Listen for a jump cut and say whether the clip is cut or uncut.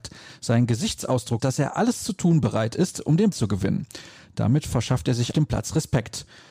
cut